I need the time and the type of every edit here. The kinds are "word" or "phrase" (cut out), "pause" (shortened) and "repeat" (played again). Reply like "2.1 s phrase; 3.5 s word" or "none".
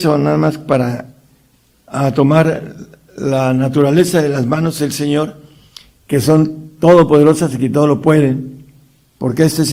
none

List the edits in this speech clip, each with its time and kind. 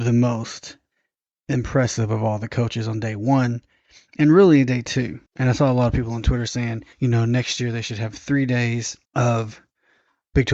5.3 s pause; 6.9 s pause; 9.0 s pause

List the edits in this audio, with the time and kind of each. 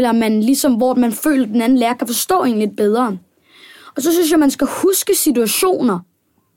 none

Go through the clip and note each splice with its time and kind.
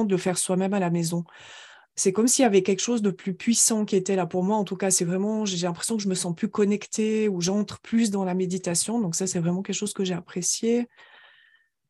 none

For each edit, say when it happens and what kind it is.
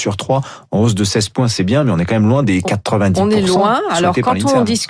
none

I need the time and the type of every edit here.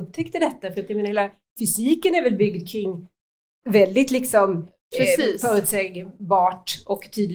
none

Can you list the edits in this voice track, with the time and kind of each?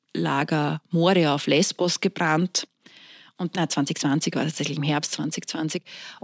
3.5 s phrase

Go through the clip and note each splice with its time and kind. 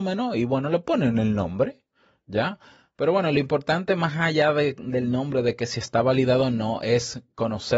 none

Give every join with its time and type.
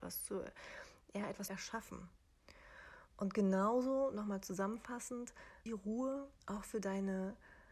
1.5 s word; 5.7 s phrase; 6.4 s pause

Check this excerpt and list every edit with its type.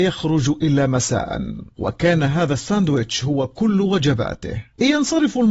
none

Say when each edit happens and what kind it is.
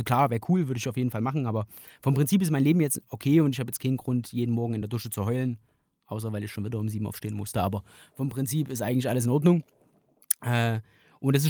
none

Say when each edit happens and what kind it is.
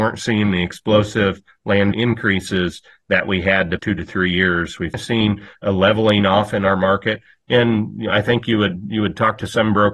1.9 s word; 3.8 s word; 4.9 s word

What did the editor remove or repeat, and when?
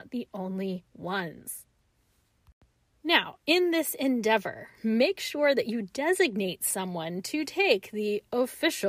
none

